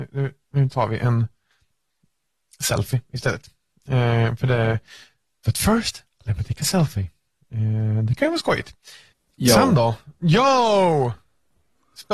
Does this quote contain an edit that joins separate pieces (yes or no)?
no